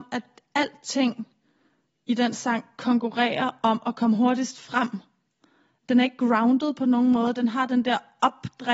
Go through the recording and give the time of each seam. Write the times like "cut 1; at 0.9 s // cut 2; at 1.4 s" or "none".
none